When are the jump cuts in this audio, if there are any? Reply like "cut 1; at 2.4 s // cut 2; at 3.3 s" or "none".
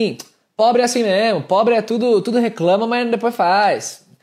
none